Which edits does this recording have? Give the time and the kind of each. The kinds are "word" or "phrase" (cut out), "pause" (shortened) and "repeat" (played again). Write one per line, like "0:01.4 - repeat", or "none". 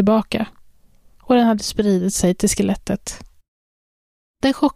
none